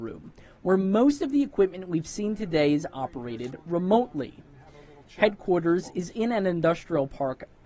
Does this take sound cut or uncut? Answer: uncut